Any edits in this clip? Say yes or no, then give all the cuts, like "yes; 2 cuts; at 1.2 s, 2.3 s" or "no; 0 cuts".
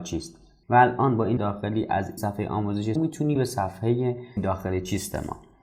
yes; 5 cuts; at 1.4 s, 2.2 s, 3.0 s, 3.4 s, 4.4 s